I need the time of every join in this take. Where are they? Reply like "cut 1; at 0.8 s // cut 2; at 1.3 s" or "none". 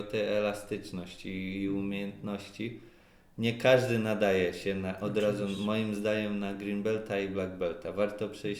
none